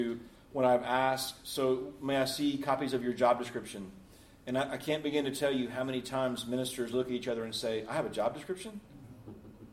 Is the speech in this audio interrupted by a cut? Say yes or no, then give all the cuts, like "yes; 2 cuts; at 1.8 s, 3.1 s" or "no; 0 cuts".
no; 0 cuts